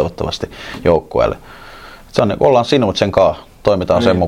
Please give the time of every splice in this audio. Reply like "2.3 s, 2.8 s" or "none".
none